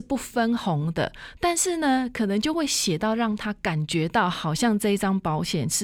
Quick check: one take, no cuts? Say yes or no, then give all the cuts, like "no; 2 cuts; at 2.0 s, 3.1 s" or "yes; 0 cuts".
yes; 0 cuts